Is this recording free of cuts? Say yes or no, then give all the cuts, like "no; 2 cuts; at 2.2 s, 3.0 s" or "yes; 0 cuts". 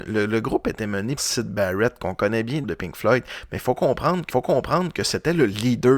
no; 3 cuts; at 1.2 s, 2.6 s, 4.3 s